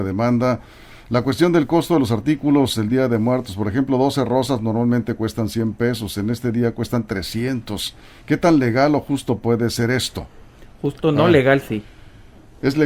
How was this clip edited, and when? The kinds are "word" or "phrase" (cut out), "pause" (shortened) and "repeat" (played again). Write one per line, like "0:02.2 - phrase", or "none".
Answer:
none